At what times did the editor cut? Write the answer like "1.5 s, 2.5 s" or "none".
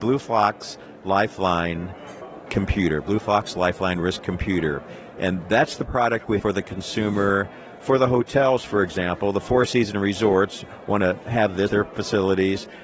2.5 s, 6.4 s, 11.7 s